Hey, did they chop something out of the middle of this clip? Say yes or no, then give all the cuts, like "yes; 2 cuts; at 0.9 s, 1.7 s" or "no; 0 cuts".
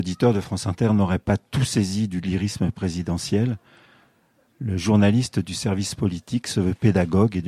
no; 0 cuts